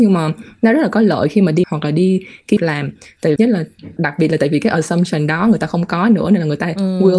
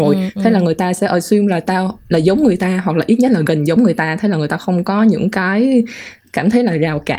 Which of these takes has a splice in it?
first; 4 cuts; at 1.6 s, 2.6 s, 3.4 s, 4.0 s

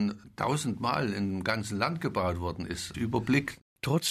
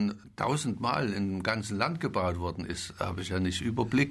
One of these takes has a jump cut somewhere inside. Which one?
first; 1 cut; at 2.9 s

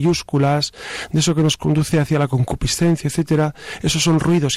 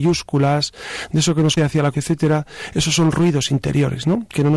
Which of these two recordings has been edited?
second; 2 cuts; at 1.6 s, 1.9 s

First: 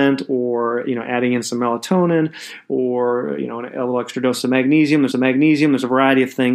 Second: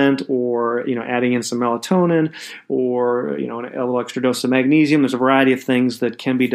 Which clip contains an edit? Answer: first; 1 cut; at 5.1 s

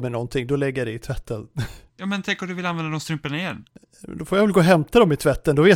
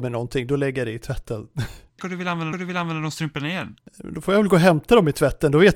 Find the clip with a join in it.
second; 3 cuts; at 2.0 s, 2.5 s, 3.9 s

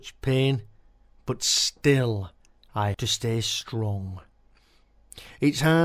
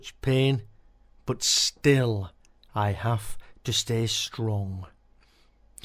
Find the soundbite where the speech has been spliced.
first; 1 cut; at 2.9 s

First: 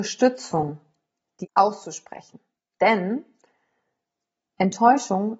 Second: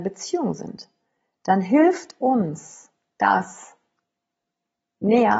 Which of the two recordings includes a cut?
first; 1 cut; at 1.4 s

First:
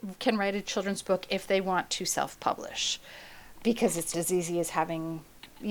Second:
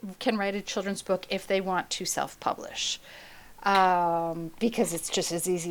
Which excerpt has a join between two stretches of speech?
first; 2 cuts; at 3.6 s, 4.1 s

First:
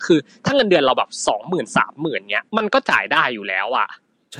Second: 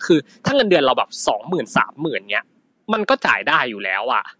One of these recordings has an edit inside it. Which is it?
first; 1 cut; at 2.5 s

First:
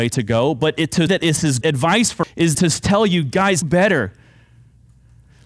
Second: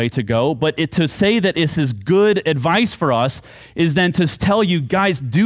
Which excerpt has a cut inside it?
first; 5 cuts; at 1.1 s, 1.6 s, 2.2 s, 2.5 s, 3.6 s

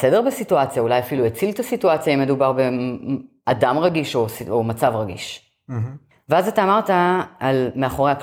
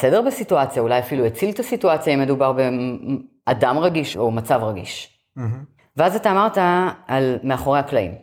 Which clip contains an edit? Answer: second; 1 cut; at 4.1 s

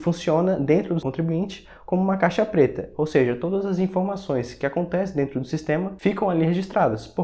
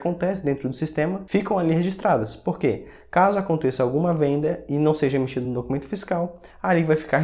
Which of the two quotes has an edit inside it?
first; 1 cut; at 1.0 s

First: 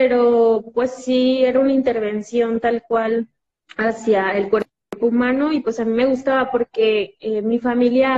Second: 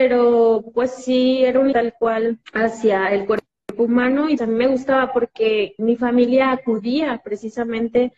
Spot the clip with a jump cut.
second; 4 cuts; at 1.7 s, 2.4 s, 4.4 s, 5.8 s

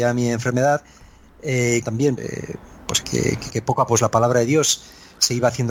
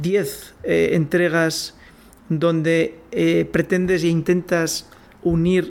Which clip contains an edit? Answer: first; 5 cuts; at 1.8 s, 2.2 s, 3.0 s, 3.5 s, 3.9 s

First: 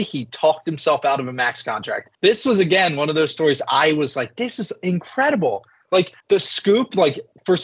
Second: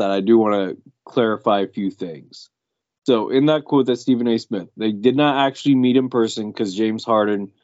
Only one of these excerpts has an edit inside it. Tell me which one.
first; 2 cuts; at 2.1 s, 6.2 s

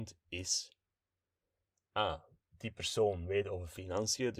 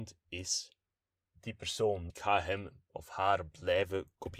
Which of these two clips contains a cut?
second; 2 cuts; at 1.2 s, 2.1 s

